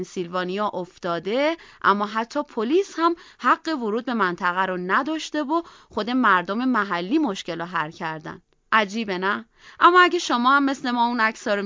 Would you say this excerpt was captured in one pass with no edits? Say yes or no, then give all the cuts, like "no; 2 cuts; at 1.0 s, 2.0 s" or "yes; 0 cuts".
yes; 0 cuts